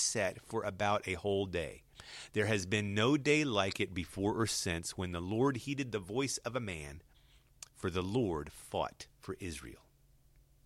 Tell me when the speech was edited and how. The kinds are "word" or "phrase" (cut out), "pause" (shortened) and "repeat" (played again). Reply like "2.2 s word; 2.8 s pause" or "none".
9.1 s pause

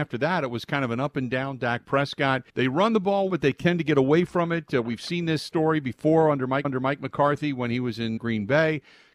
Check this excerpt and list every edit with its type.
2.5 s pause; 3.3 s word; 6.6 s repeat; 8.2 s word

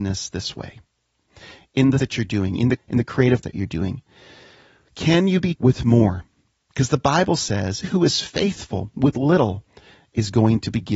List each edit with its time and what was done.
2.0 s word; 2.8 s word; 3.4 s word; 5.5 s word; 7.8 s word

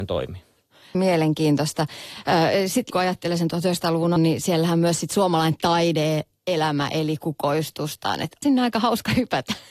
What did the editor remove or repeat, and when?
0.9 s word; 2.9 s word; 4.2 s word; 8.4 s word

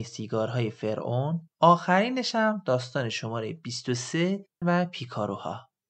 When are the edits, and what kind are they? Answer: 1.5 s pause; 4.6 s phrase

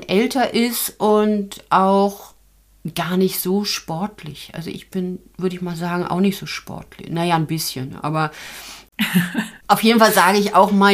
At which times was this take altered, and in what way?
9.6 s pause

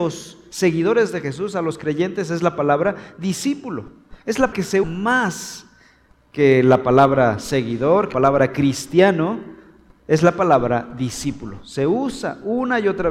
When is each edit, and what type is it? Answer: 4.5 s word; 4.8 s word; 8.1 s word

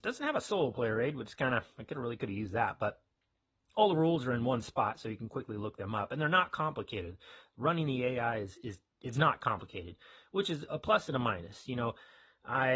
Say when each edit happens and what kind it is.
none

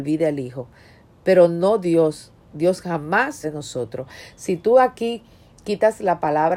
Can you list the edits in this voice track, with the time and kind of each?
3.4 s word

